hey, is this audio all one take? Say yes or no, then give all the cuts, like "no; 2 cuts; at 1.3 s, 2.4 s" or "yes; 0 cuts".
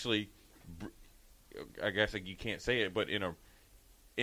yes; 0 cuts